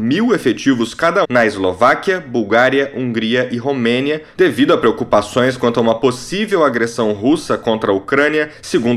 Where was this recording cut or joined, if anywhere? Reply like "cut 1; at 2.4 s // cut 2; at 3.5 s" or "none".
cut 1; at 1.2 s